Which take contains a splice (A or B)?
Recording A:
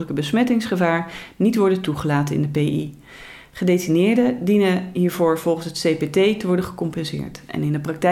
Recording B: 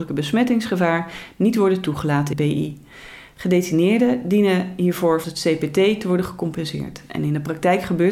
B